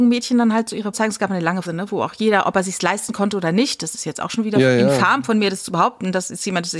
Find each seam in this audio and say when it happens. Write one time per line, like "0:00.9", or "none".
0:00.9
0:01.6